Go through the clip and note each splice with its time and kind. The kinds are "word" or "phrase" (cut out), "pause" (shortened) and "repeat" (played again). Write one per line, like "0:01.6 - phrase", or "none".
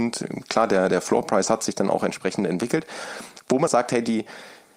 0:03.7 - word